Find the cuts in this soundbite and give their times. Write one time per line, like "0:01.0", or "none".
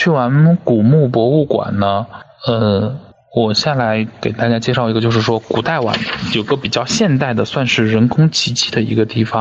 none

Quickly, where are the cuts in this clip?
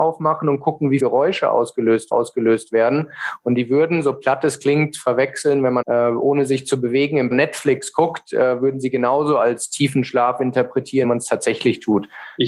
0:01.0
0:02.1
0:05.8
0:07.3
0:11.0

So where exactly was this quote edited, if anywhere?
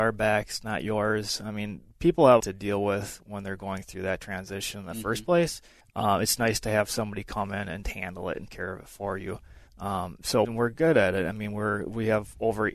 0:02.4
0:05.8
0:07.8
0:08.5
0:09.7
0:10.4

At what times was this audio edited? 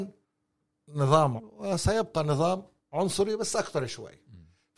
0:01.4
0:02.8

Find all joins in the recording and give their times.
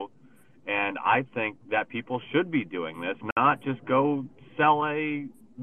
none

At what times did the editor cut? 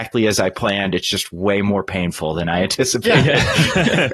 none

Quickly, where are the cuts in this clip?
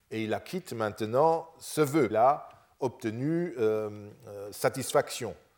0:02.1

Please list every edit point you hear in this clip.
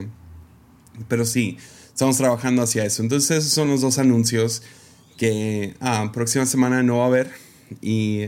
none

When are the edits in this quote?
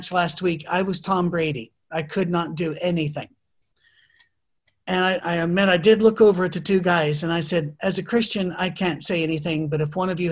0:05.2

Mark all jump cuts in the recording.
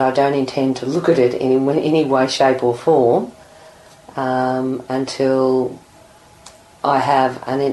none

